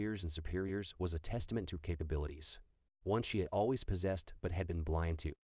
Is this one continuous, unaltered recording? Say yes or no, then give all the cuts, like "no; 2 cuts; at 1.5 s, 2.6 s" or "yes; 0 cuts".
yes; 0 cuts